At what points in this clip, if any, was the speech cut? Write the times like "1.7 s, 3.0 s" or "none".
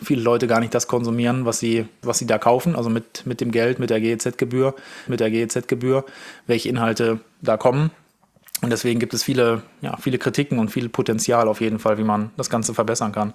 2.0 s, 5.1 s